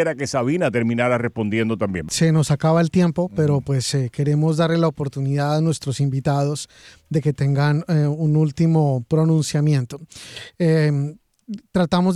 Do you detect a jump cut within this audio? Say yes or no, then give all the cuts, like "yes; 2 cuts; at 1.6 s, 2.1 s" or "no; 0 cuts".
no; 0 cuts